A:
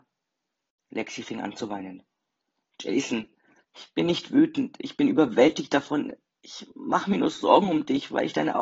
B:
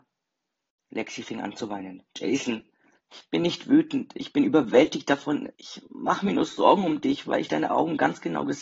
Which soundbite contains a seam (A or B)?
B